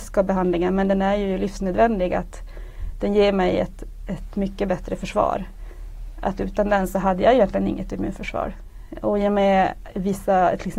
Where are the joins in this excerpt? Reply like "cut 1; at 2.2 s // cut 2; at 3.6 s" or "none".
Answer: none